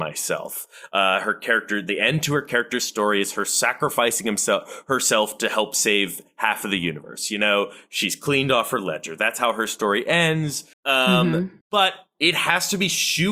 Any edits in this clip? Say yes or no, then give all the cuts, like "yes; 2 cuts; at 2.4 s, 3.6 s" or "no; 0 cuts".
yes; 2 cuts; at 10.7 s, 11.6 s